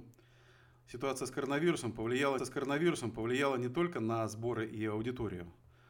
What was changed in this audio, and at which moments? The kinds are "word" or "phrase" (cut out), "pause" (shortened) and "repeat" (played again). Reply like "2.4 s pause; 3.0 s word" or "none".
2.4 s repeat